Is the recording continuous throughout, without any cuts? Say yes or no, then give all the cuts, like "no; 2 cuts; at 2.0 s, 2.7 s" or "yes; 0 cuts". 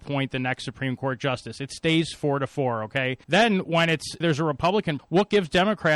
no; 3 cuts; at 3.2 s, 4.2 s, 5.0 s